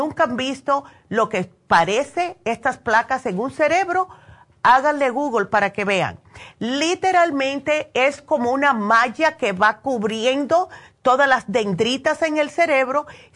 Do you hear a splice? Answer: no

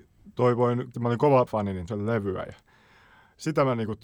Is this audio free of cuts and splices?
no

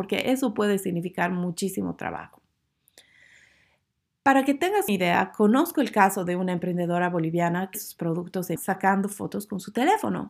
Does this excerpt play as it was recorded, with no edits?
no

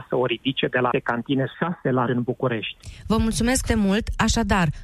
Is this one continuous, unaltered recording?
no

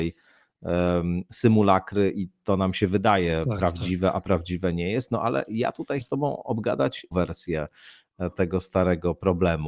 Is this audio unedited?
no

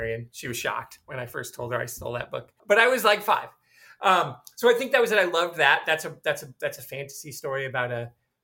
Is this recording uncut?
no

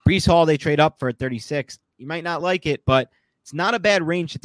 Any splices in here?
no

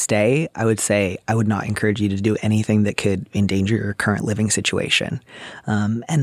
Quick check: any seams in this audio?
no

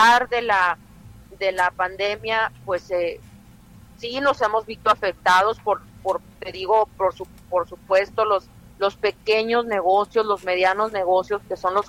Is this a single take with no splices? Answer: yes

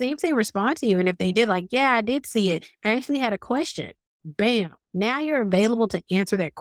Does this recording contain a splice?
no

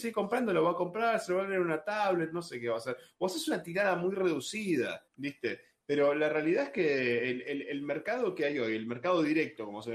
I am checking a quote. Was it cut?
yes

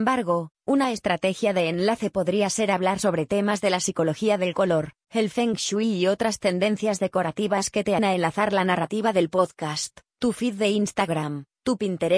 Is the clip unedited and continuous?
no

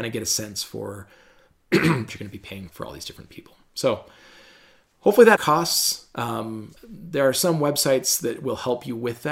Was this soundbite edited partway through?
yes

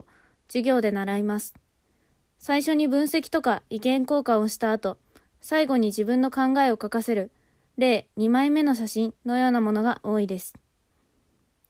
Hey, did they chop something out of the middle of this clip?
no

